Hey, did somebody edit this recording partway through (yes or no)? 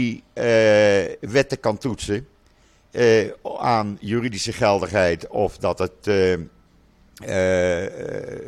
no